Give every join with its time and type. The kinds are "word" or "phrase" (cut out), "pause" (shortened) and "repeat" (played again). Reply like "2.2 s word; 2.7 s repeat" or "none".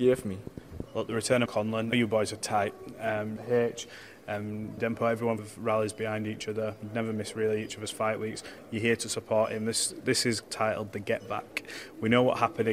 1.5 s word; 1.9 s phrase; 3.4 s phrase; 4.8 s word; 5.4 s phrase